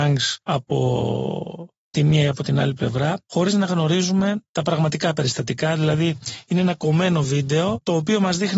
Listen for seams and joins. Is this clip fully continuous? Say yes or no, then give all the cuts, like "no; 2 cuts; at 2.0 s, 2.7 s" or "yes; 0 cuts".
yes; 0 cuts